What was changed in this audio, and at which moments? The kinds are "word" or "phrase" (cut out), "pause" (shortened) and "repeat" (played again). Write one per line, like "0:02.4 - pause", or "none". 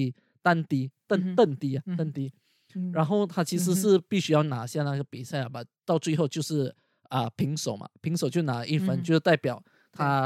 none